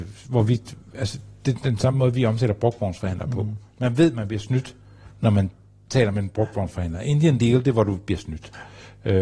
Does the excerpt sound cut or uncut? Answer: uncut